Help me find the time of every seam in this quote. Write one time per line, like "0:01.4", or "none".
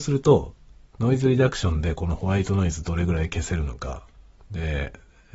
none